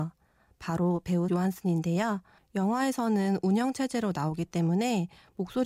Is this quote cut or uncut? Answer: cut